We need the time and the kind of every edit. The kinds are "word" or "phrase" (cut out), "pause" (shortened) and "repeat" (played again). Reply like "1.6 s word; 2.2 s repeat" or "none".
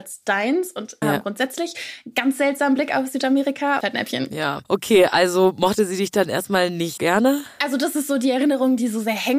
1.0 s word; 3.8 s phrase; 7.0 s word